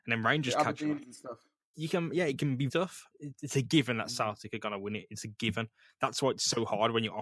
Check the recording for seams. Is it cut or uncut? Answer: cut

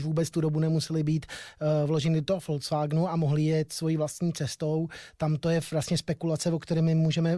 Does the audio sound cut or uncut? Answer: uncut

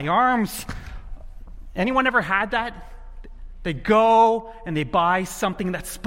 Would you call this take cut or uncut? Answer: uncut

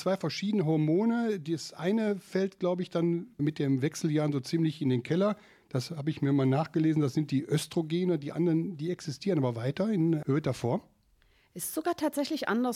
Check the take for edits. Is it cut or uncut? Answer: uncut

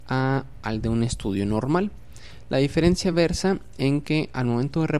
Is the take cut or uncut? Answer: uncut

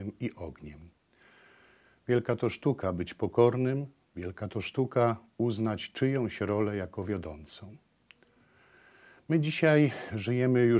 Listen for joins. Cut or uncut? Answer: uncut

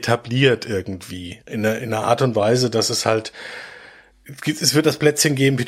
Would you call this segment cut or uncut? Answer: uncut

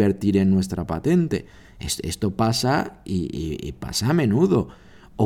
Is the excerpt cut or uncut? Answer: uncut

